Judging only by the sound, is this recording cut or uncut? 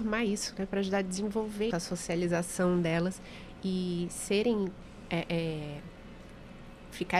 cut